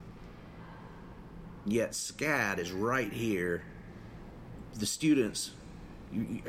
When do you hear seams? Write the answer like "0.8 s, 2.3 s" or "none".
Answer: 1.7 s